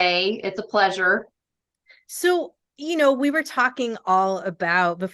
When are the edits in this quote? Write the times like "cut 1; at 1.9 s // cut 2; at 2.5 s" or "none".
none